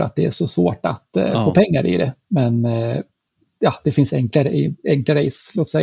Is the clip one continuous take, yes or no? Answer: no